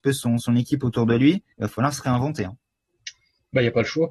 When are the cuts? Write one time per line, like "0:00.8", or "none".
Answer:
0:01.5